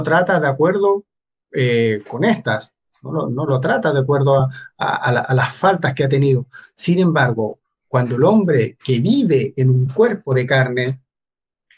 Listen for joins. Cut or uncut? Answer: uncut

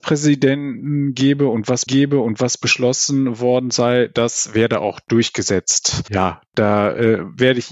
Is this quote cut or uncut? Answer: cut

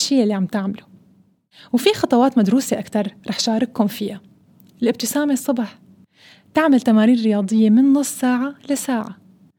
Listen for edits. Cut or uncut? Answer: uncut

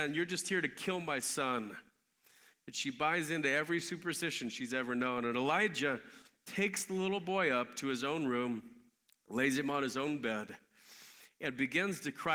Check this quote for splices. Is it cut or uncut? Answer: uncut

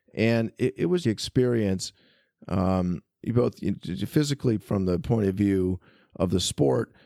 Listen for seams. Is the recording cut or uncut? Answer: cut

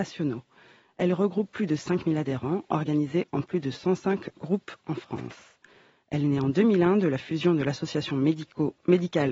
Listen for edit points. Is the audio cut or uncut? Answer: uncut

